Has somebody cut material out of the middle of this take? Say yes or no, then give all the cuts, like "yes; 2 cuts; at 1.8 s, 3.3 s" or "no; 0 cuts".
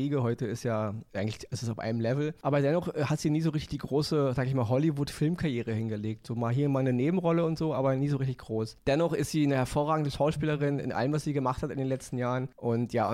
no; 0 cuts